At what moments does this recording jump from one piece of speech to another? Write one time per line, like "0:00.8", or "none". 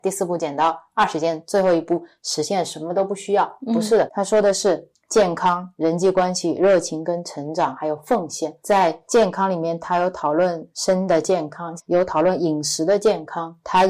0:04.1
0:11.8